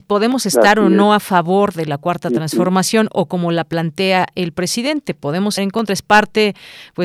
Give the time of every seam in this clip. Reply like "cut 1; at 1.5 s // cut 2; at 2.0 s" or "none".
cut 1; at 5.6 s